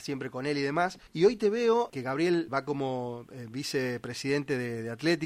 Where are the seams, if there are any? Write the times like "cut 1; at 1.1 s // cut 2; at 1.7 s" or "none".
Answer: cut 1; at 1.1 s // cut 2; at 1.9 s // cut 3; at 2.5 s